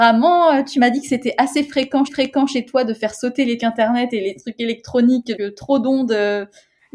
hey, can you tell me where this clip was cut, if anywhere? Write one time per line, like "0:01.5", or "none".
0:02.1
0:03.6
0:05.4